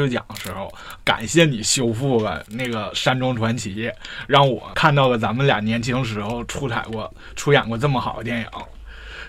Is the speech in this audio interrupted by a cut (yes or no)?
yes